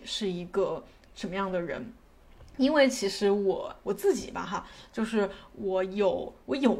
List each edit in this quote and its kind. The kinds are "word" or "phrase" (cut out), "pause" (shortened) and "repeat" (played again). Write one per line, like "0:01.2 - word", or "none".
none